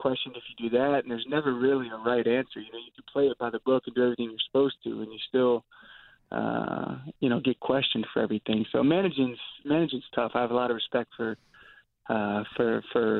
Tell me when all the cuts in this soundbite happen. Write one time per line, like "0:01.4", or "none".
none